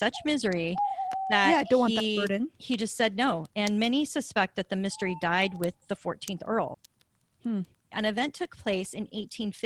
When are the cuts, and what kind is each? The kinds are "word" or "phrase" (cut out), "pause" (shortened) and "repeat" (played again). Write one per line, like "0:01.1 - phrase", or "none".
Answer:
none